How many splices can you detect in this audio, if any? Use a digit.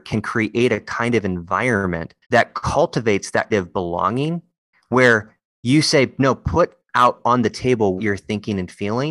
3